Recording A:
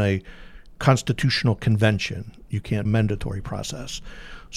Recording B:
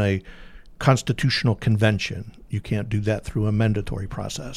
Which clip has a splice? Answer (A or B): A